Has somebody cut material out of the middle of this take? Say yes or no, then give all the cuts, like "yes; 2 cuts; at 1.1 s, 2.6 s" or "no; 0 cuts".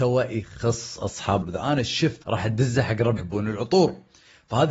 yes; 3 cuts; at 1.4 s, 2.2 s, 3.2 s